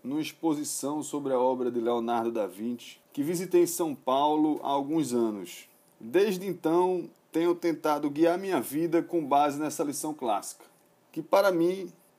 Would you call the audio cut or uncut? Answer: uncut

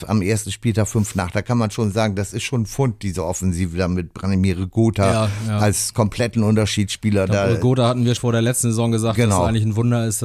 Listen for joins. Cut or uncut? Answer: cut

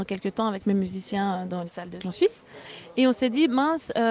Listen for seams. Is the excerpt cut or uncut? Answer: cut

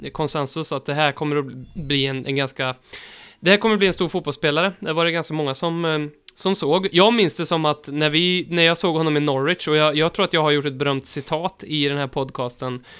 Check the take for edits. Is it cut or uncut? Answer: uncut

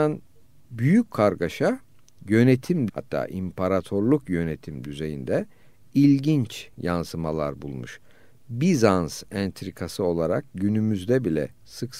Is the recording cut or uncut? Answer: cut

